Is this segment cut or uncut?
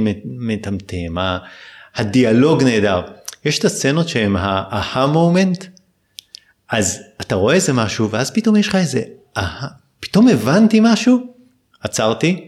uncut